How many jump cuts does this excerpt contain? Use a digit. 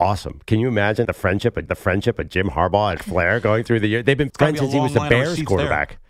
4